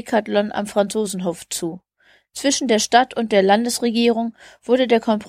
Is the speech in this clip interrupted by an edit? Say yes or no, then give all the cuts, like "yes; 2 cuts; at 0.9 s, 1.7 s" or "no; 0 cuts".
no; 0 cuts